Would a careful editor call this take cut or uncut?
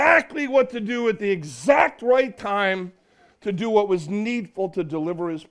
uncut